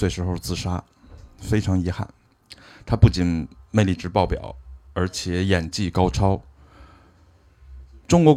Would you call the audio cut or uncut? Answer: uncut